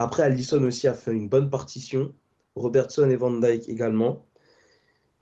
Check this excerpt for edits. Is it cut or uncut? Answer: uncut